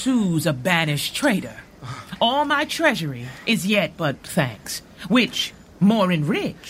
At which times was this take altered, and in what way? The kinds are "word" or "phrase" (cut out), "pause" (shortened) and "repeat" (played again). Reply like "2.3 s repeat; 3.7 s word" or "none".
4.2 s word

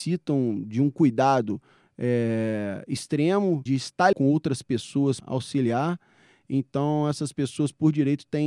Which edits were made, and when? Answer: 3.7 s word; 4.1 s word; 5.2 s word

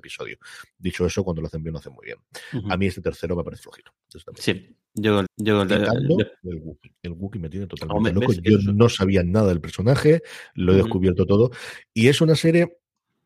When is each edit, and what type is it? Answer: 3.6 s word; 5.3 s repeat; 7.0 s pause

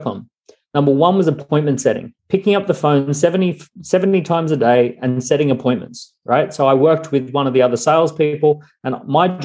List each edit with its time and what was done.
2.2 s pause

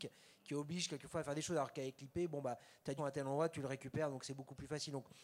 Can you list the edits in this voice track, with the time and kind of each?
3.0 s word

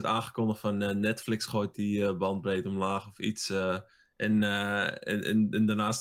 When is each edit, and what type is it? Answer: none

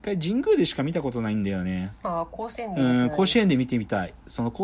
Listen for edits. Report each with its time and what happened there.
2.0 s pause

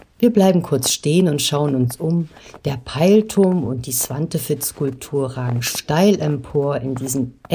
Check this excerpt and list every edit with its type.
none

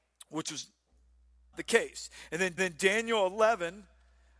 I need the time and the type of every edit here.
1.5 s word; 2.6 s repeat

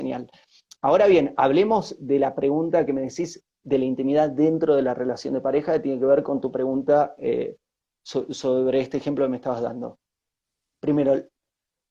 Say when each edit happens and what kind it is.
none

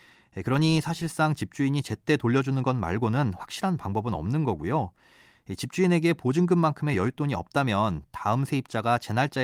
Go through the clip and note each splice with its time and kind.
none

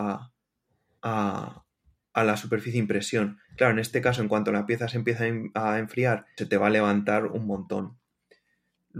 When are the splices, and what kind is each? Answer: 3.4 s pause; 6.4 s word

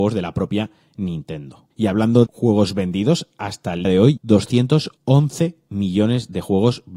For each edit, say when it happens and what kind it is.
2.3 s word; 3.8 s word; 4.2 s word

